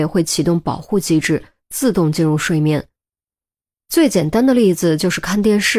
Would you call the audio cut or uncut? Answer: uncut